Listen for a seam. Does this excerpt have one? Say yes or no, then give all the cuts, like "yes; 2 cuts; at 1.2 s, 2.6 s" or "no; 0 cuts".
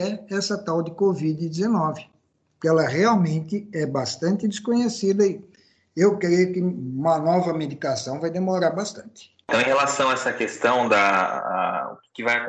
no; 0 cuts